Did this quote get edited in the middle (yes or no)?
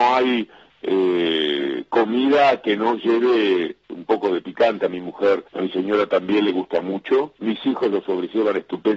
yes